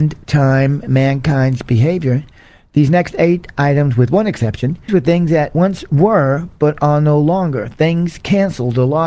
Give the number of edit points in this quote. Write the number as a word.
one